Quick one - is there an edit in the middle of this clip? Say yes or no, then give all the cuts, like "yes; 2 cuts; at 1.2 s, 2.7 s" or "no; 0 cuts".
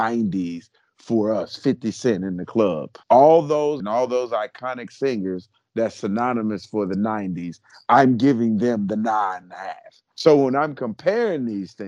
yes; 4 cuts; at 3.0 s, 3.8 s, 9.4 s, 10.1 s